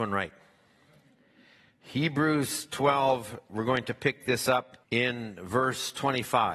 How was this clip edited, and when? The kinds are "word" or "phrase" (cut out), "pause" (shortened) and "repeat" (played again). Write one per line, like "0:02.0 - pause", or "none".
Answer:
0:04.8 - pause